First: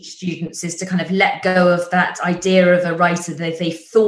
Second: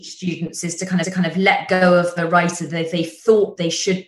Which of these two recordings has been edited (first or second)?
second